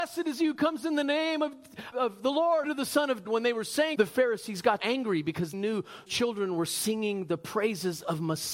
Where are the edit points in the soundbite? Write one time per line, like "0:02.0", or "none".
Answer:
0:01.9
0:02.6
0:03.2
0:03.9
0:04.8
0:05.5
0:06.1